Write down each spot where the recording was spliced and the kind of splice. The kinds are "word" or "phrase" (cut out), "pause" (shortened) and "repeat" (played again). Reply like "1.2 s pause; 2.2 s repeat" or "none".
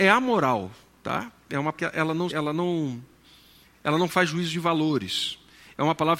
1.7 s word; 2.3 s word